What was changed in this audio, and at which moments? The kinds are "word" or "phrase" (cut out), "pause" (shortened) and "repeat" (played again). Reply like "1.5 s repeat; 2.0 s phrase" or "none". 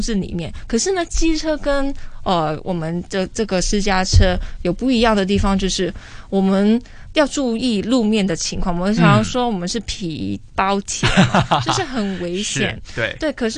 none